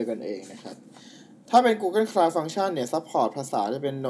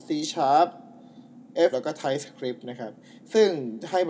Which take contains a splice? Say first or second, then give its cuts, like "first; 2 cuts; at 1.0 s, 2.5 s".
second; 1 cut; at 1.7 s